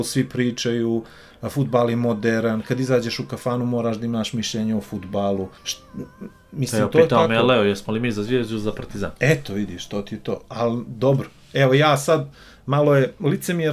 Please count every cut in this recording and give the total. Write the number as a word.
one